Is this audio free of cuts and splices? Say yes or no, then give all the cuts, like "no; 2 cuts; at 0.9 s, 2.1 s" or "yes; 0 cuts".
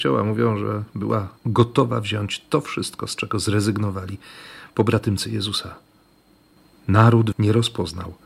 no; 2 cuts; at 1.4 s, 7.3 s